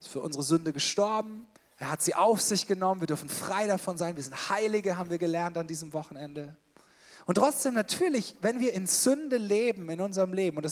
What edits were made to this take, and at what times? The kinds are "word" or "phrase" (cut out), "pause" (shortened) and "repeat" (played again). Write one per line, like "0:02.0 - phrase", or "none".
0:01.6 - pause